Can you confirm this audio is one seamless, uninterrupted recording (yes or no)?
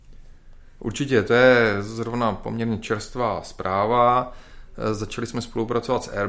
yes